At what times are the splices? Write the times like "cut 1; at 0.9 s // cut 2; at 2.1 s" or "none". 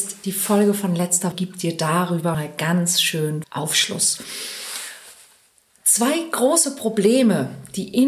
cut 1; at 1.3 s // cut 2; at 2.3 s // cut 3; at 3.4 s